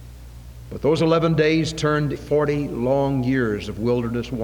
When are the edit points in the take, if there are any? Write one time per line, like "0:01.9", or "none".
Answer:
0:02.1

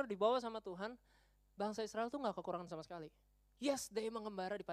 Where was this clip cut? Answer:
none

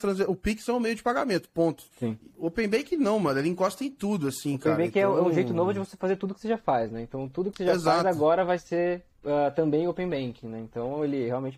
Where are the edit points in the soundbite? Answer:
0:01.9
0:09.1

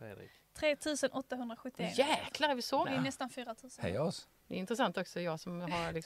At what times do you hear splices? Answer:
0:02.8

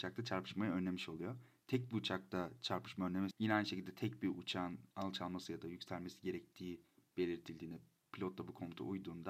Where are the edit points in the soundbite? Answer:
0:03.3
0:04.9

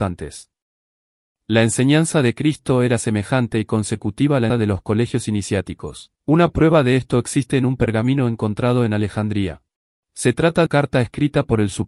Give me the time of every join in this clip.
0:04.5
0:06.2
0:09.8
0:10.7

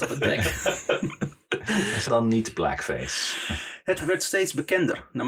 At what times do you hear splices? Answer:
0:02.1
0:04.0

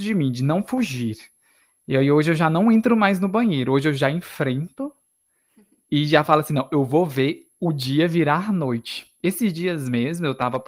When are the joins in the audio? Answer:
none

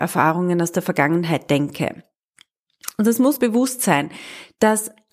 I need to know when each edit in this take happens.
0:03.4

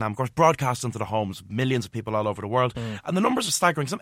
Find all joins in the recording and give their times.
none

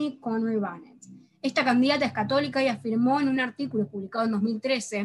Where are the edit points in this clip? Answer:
none

